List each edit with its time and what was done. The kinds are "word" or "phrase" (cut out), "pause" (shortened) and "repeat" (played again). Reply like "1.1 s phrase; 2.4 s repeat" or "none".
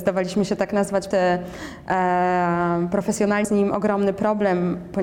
1.1 s phrase; 3.4 s word